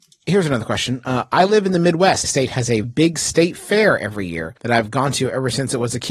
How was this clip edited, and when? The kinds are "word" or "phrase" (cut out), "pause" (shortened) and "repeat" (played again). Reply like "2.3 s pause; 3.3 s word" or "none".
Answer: 2.2 s phrase; 2.8 s word; 4.6 s pause